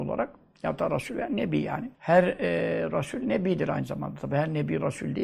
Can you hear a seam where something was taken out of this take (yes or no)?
yes